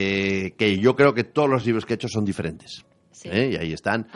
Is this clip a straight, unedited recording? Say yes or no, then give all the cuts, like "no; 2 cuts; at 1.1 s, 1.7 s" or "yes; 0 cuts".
yes; 0 cuts